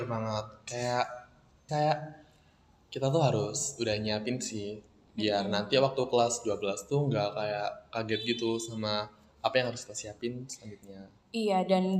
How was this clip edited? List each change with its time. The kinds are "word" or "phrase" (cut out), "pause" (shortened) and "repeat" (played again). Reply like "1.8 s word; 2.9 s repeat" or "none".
1.7 s word